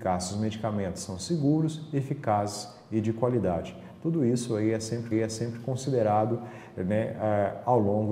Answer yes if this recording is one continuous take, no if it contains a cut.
no